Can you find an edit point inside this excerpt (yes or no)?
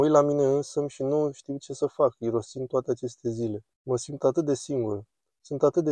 yes